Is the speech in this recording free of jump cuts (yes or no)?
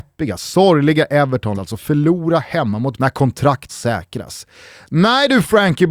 no